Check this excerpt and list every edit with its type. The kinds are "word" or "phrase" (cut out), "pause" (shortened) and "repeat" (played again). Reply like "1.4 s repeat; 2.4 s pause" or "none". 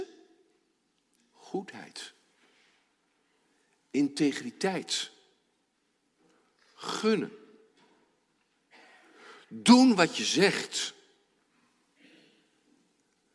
1.2 s word